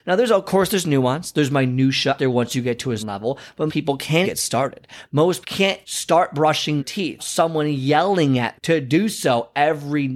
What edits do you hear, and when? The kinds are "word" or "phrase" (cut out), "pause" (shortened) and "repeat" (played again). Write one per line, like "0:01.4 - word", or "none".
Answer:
0:02.2 - word
0:03.0 - word
0:03.7 - word
0:04.2 - word
0:05.4 - word
0:05.8 - word
0:06.8 - word
0:07.2 - word
0:08.6 - word